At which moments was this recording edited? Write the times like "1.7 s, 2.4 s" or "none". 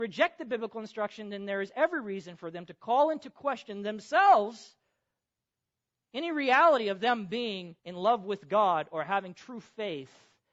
7.8 s